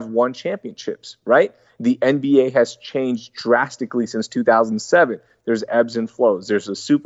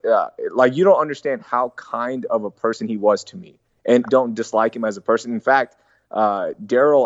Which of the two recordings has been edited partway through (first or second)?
second